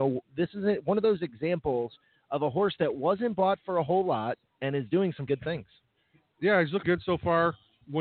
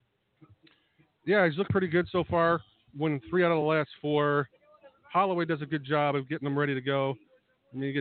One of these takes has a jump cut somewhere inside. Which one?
first; 4 cuts; at 4.4 s, 5.3 s, 6.0 s, 6.8 s

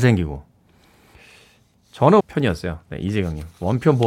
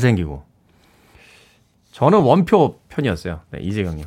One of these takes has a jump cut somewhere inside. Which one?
first; 1 cut; at 2.2 s

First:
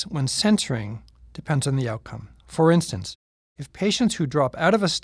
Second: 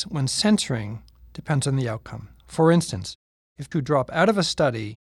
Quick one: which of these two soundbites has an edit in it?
second; 1 cut; at 3.7 s

